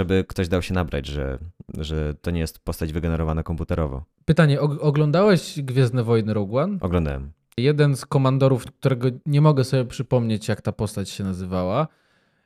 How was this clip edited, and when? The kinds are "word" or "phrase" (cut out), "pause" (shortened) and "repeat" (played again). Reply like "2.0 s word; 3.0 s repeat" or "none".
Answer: 9.2 s pause